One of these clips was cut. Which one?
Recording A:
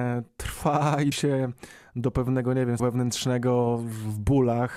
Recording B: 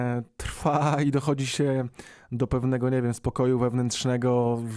A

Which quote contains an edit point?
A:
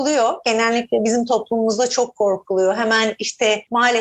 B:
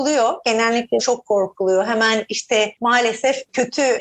B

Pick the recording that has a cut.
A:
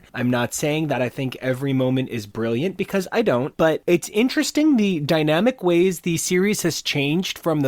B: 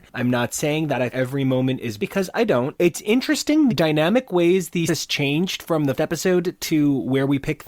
B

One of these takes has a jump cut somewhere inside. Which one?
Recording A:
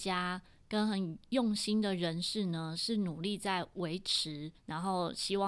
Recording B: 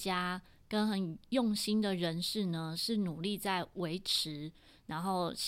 A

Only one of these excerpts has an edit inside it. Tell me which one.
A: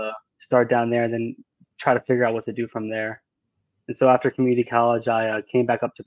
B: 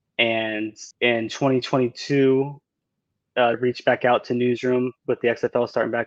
B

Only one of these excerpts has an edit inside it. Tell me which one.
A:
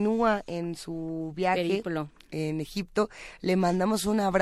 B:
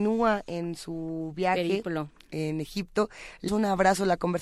B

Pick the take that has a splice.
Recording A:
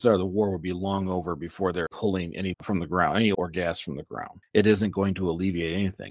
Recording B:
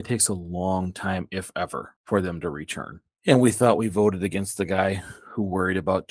A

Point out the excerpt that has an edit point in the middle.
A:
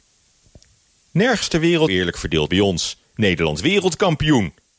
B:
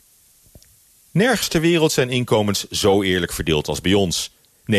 A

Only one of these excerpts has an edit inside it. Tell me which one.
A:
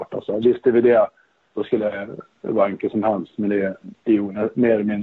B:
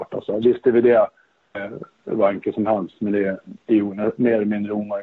B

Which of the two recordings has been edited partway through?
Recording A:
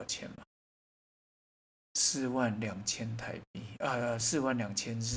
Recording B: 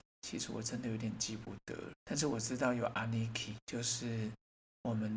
B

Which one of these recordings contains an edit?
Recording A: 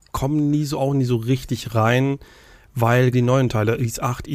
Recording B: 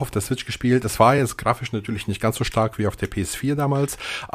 A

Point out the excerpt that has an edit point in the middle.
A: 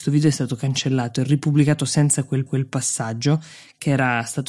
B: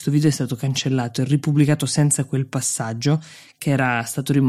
A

